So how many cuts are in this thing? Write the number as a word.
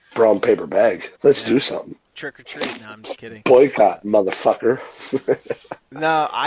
one